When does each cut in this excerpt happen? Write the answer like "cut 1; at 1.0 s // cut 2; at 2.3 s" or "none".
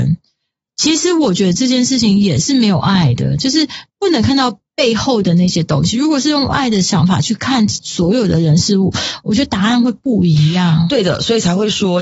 cut 1; at 3.9 s